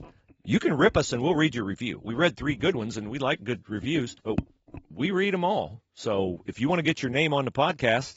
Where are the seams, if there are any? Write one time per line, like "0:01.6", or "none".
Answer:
0:04.2